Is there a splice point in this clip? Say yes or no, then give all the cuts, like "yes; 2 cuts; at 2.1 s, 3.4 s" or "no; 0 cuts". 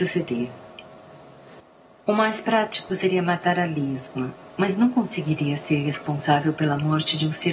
yes; 1 cut; at 4.4 s